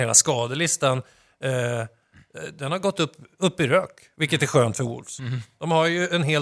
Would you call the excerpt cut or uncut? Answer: uncut